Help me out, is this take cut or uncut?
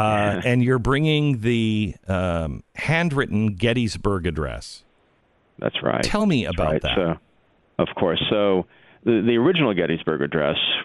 uncut